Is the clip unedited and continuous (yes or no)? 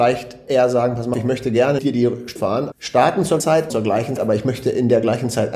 no